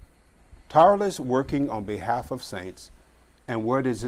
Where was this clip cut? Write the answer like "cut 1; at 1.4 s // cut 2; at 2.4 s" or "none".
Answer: none